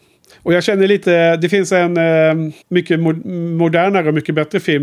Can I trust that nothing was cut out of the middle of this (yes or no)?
no